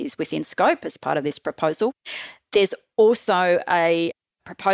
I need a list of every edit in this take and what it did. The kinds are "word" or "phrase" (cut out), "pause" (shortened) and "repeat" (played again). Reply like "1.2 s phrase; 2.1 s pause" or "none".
none